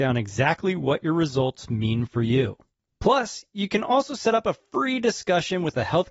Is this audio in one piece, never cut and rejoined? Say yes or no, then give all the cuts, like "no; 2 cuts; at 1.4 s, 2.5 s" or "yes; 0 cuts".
yes; 0 cuts